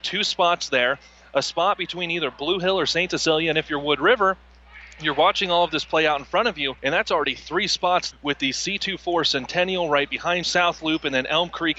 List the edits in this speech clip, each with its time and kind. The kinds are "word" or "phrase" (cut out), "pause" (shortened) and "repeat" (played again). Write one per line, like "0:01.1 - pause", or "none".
0:06.8 - pause
0:08.1 - word
0:10.4 - word